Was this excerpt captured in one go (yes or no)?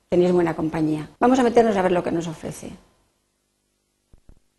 no